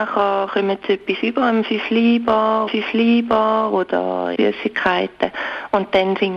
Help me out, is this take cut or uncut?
cut